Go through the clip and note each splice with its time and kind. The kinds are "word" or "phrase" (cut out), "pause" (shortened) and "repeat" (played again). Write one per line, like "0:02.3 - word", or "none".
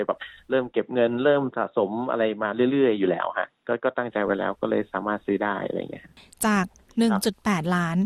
none